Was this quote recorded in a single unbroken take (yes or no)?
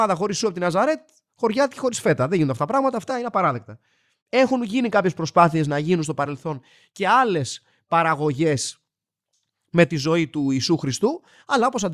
yes